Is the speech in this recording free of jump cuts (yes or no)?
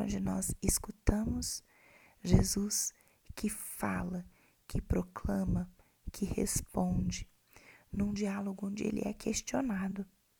yes